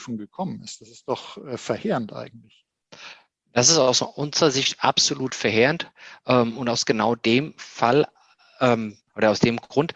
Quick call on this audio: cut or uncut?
uncut